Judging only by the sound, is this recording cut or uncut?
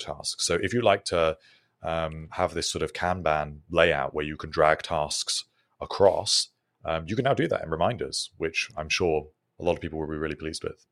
uncut